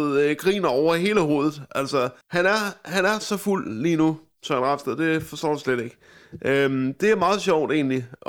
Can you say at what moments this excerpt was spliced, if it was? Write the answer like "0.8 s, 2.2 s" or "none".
2.2 s